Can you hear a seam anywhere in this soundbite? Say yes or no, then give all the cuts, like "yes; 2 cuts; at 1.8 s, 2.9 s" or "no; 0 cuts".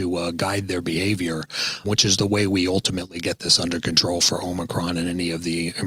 yes; 1 cut; at 1.8 s